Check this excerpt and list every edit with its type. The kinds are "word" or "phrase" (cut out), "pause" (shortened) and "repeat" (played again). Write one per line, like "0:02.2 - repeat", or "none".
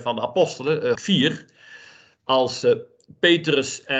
0:01.0 - word